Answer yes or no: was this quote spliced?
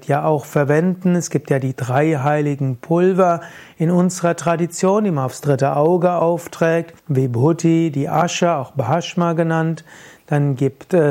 yes